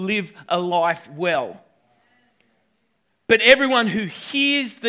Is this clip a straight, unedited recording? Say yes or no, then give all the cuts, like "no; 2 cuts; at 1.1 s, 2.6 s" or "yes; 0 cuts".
yes; 0 cuts